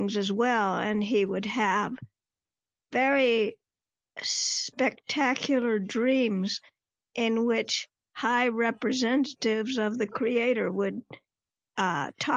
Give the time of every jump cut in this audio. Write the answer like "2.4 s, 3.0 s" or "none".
none